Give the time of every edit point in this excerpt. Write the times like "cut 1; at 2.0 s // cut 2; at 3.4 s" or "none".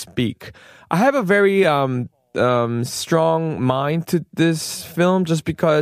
none